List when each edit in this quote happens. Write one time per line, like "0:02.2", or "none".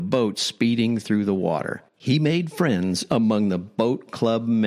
0:01.9